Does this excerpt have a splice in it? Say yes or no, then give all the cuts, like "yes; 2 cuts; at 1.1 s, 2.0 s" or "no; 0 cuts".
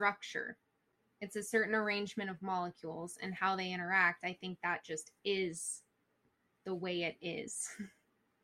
no; 0 cuts